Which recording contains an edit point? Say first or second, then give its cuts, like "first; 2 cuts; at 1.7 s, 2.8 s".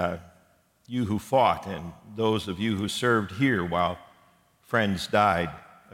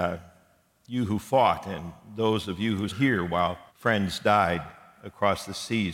second; 2 cuts; at 2.9 s, 3.7 s